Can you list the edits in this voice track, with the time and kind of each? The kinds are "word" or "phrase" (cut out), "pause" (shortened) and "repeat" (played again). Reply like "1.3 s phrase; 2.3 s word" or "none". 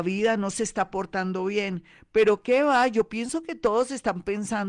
none